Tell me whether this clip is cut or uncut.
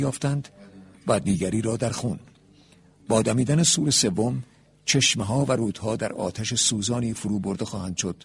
uncut